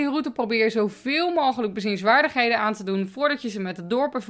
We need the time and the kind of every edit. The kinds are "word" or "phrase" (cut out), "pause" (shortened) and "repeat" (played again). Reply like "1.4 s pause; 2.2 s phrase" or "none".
none